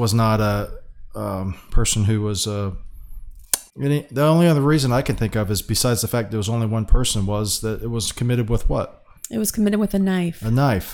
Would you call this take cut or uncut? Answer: cut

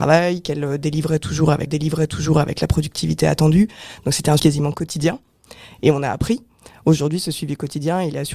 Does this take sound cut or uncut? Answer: cut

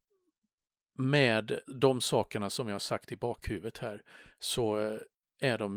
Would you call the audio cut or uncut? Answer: cut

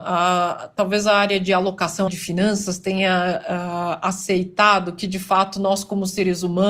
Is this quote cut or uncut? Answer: cut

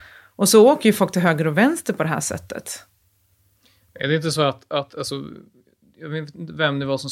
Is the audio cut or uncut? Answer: uncut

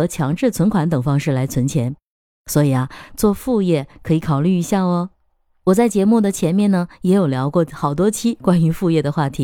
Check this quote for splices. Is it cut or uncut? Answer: uncut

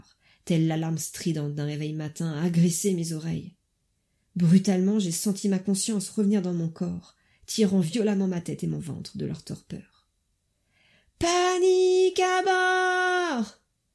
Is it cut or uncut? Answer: uncut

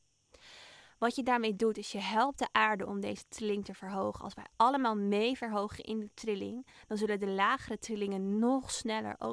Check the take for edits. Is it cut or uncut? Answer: uncut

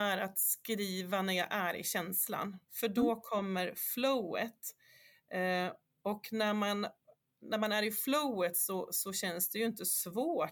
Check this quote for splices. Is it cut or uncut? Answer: uncut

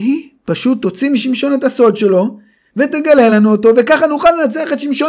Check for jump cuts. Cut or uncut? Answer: uncut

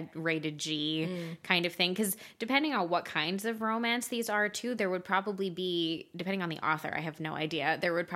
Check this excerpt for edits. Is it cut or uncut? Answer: uncut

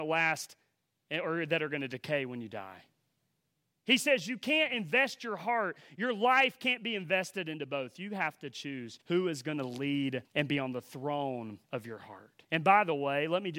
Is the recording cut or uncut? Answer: cut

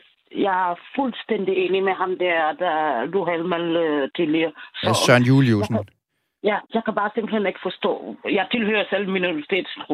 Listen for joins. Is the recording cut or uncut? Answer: cut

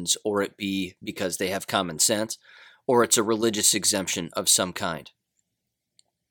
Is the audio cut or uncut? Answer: uncut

